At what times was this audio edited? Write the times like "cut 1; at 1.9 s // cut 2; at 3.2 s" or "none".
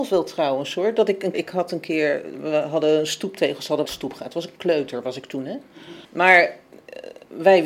cut 1; at 1.3 s // cut 2; at 3.9 s // cut 3; at 6.0 s